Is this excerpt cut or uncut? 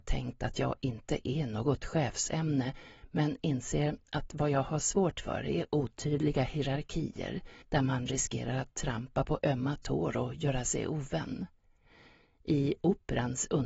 cut